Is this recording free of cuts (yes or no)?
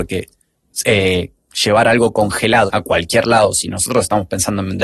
no